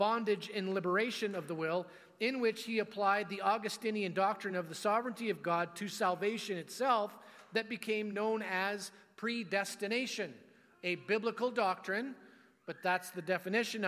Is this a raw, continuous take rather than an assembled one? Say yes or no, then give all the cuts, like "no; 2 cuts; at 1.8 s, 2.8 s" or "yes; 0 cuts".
yes; 0 cuts